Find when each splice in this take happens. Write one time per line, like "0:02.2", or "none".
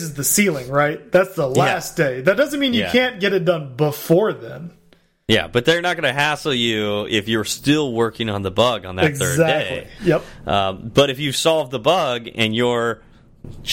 none